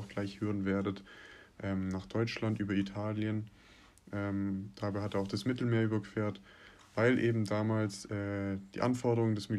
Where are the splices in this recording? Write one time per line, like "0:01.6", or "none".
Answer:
none